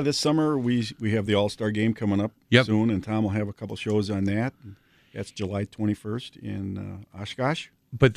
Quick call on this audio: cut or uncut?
uncut